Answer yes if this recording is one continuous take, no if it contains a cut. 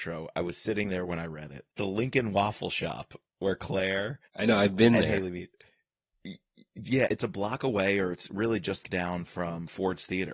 no